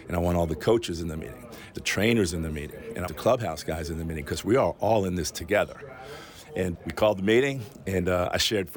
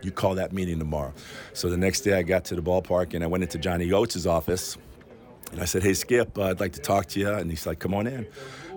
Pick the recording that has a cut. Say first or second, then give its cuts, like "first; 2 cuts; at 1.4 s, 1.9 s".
first; 3 cuts; at 1.8 s, 3.1 s, 6.7 s